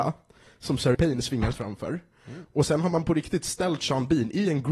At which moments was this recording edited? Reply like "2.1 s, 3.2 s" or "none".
0.9 s, 1.5 s

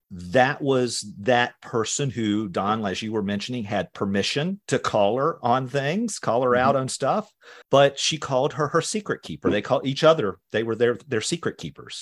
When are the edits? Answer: 7.6 s

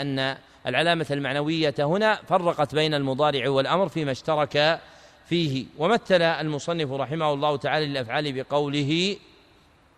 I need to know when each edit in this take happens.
none

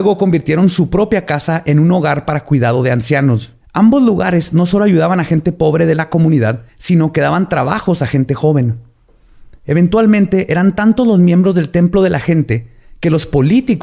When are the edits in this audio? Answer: 3.6 s, 6.7 s

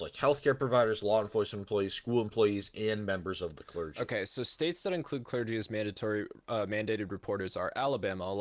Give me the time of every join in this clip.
none

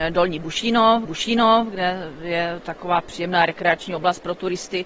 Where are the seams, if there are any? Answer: 1.1 s

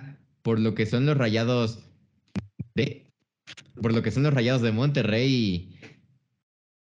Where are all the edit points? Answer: 3.7 s

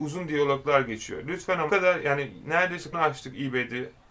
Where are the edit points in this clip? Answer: 1.7 s, 2.9 s

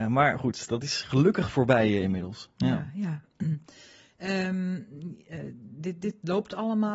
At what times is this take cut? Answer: none

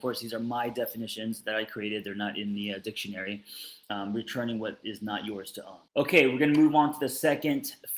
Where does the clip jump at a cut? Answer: 3.8 s, 5.9 s

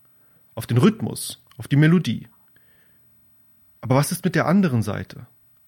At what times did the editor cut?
none

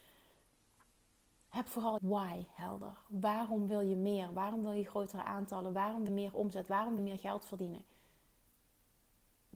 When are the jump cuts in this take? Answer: 2.0 s, 6.1 s, 7.0 s

